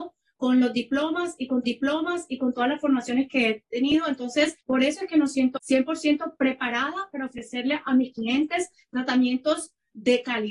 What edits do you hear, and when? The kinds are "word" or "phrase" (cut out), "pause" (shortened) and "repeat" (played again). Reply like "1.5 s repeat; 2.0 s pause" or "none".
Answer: 1.6 s repeat; 4.6 s pause; 5.6 s phrase